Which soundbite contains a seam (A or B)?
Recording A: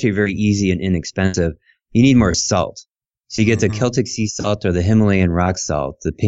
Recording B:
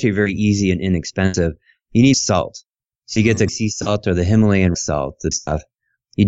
B